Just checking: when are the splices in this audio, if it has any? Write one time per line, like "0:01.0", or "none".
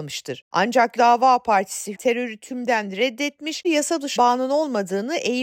0:01.0
0:01.9
0:03.6
0:04.2